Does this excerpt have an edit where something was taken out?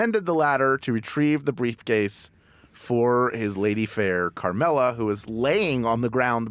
no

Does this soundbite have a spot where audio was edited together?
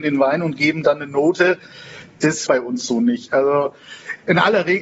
yes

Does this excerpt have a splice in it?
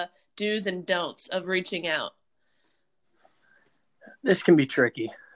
no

